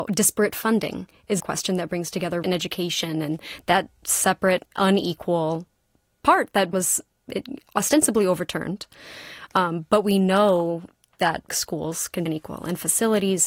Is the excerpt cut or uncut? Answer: cut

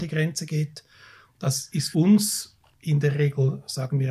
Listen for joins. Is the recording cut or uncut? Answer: cut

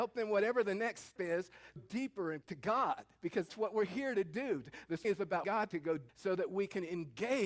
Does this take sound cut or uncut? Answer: cut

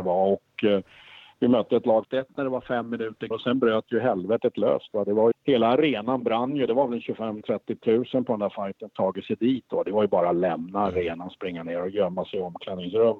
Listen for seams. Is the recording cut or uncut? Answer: cut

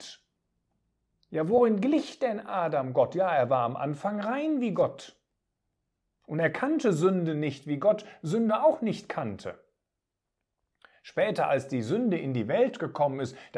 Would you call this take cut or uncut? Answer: uncut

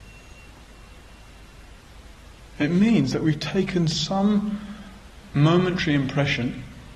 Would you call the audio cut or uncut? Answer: uncut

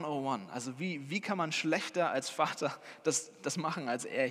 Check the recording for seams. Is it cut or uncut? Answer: uncut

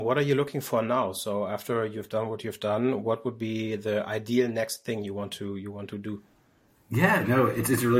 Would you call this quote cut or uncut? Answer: uncut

